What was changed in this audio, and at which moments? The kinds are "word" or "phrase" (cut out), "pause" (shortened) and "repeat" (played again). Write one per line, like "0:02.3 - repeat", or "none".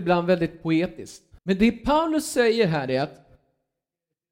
0:01.4 - pause